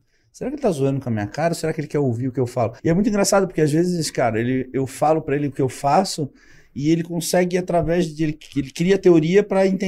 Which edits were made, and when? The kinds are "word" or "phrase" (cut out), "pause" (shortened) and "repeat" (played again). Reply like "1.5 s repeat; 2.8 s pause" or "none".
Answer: 2.8 s pause